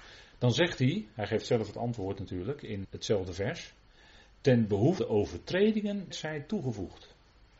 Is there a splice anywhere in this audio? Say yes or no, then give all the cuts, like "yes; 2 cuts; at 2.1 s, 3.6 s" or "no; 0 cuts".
yes; 3 cuts; at 2.8 s, 5.0 s, 6.1 s